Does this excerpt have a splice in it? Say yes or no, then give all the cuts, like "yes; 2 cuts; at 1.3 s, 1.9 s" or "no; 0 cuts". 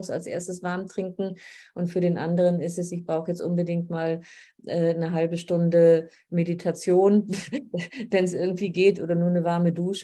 no; 0 cuts